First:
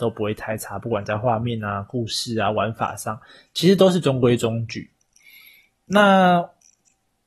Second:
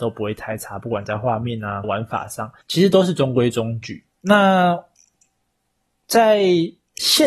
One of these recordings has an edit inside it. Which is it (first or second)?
second